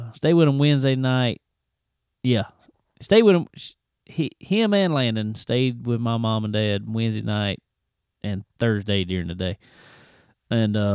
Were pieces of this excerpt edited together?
no; 0 cuts

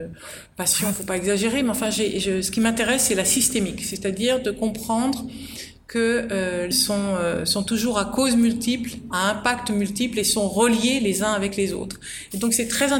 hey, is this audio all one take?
no; 1 cut; at 6.7 s

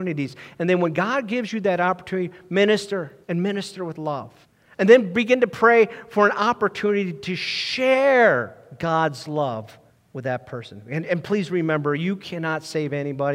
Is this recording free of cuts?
no; 3 cuts; at 3.2 s, 4.4 s, 9.9 s

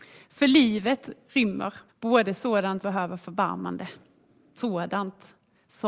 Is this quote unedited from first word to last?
no; 3 cuts; at 1.9 s, 2.8 s, 4.6 s

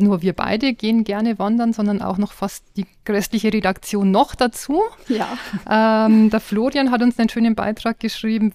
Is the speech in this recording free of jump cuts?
yes; 0 cuts

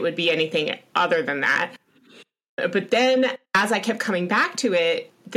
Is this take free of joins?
no; 1 cut; at 3.4 s

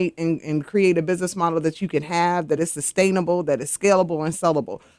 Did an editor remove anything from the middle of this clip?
no; 0 cuts

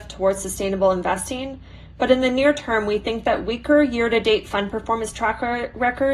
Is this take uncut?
yes; 0 cuts

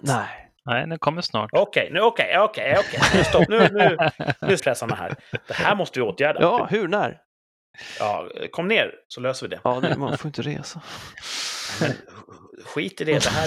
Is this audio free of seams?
no; 1 cut; at 4.6 s

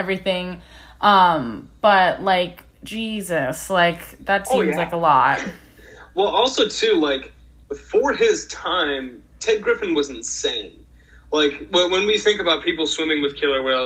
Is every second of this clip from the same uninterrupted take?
no; 1 cut; at 4.4 s

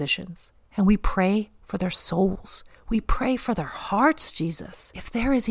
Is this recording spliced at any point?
no; 0 cuts

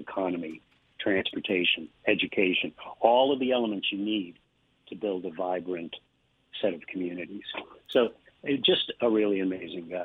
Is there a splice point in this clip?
no; 0 cuts

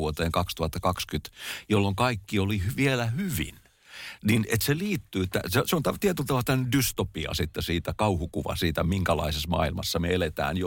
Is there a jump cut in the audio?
no; 0 cuts

